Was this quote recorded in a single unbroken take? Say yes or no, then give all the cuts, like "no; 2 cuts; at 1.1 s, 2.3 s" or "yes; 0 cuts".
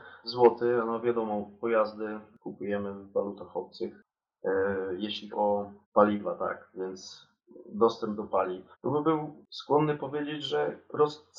no; 3 cuts; at 5.3 s, 5.8 s, 8.7 s